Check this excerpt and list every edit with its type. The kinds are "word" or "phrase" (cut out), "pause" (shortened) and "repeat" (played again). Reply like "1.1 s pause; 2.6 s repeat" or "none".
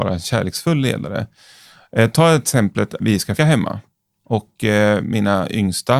3.0 s word; 3.4 s word